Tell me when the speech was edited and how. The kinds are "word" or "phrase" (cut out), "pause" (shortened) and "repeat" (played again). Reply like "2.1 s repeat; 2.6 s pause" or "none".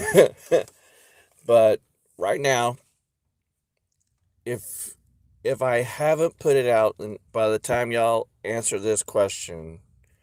7.3 s pause